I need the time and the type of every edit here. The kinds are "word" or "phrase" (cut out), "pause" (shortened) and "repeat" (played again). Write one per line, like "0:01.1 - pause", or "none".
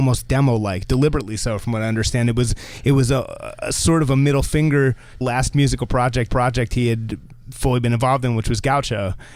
0:03.6 - word
0:05.2 - phrase
0:06.3 - repeat